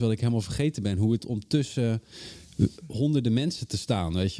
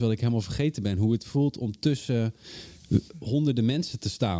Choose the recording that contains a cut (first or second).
first